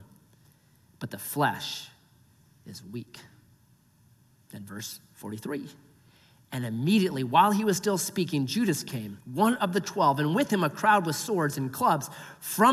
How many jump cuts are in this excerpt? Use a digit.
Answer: 1